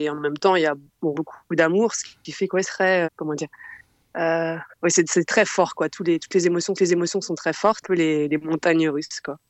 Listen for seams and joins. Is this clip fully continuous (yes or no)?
no